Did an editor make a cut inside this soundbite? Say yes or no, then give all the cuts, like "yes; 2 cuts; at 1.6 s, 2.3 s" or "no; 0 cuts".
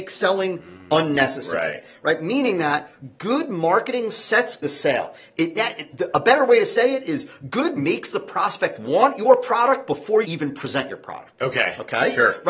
yes; 4 cuts; at 4.6 s, 5.6 s, 7.8 s, 10.2 s